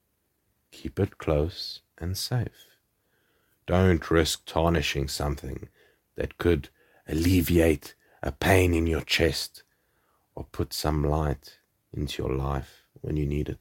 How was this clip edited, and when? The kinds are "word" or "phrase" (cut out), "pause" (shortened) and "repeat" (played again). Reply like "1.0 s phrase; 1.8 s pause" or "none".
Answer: none